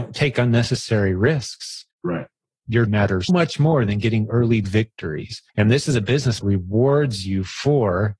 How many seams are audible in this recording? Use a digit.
6